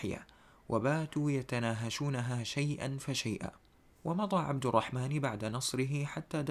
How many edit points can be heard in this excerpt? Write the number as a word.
zero